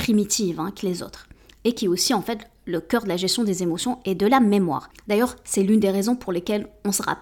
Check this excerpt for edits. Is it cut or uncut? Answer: uncut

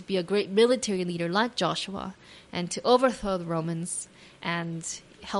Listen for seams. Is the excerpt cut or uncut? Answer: uncut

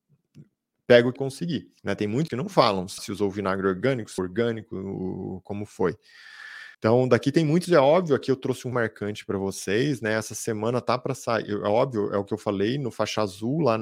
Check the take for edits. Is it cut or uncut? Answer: cut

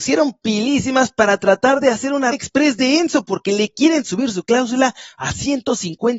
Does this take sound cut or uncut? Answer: cut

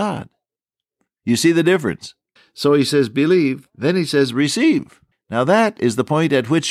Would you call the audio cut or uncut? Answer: cut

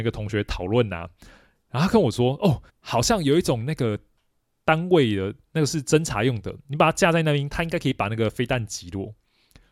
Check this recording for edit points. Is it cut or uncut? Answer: cut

